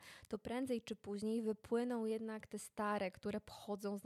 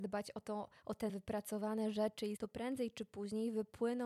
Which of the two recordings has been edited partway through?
second; 2 cuts; at 1.1 s, 2.4 s

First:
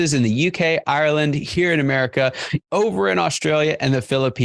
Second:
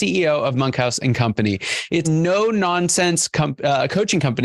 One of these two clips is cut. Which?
second; 1 cut; at 2.0 s

